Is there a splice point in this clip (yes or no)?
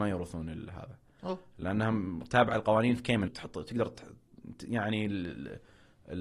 yes